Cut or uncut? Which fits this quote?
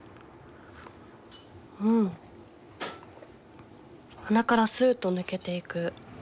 cut